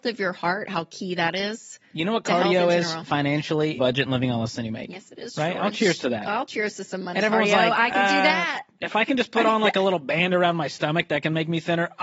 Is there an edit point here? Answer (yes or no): yes